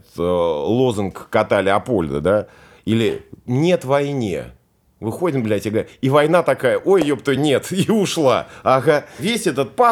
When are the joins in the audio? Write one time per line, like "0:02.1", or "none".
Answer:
none